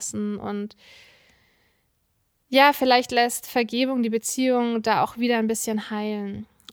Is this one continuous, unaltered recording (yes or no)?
yes